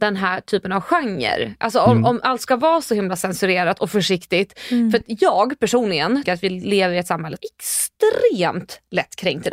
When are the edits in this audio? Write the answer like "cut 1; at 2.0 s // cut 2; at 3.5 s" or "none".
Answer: cut 1; at 6.3 s // cut 2; at 7.4 s